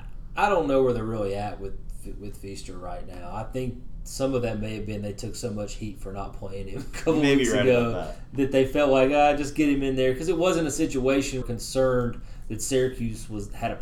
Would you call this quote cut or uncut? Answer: cut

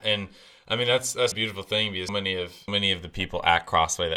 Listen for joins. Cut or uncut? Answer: cut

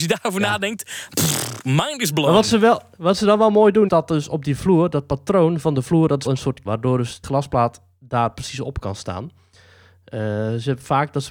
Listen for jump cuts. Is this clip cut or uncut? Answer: cut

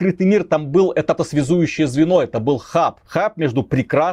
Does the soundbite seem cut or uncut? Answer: cut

